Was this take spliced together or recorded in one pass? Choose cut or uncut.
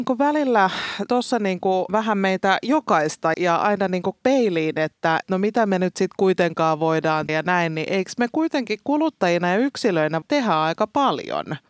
cut